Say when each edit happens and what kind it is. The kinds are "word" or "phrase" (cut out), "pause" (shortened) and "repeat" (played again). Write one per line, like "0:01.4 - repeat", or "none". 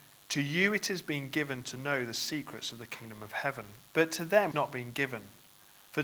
0:03.9 - pause
0:04.5 - word

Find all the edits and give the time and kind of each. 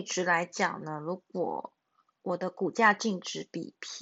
none

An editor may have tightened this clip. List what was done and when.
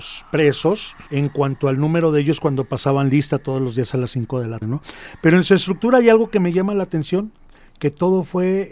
0:01.1 - pause
0:04.6 - word

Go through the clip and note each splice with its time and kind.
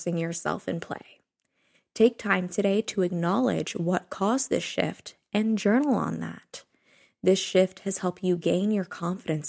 none

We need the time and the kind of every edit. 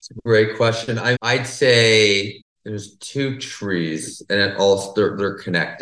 0:01.1 - word

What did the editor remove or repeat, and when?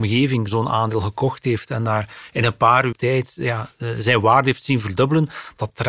0:02.9 - word

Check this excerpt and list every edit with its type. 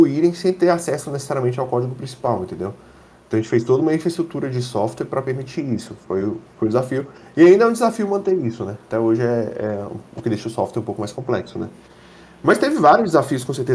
none

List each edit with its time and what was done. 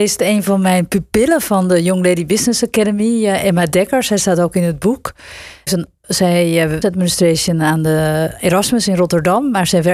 0:05.7 - phrase
0:06.8 - phrase

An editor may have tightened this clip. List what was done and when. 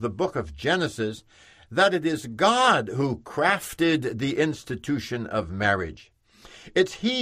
none

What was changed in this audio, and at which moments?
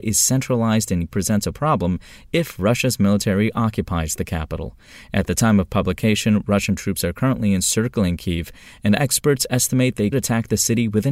0:01.1 - word
0:10.1 - word

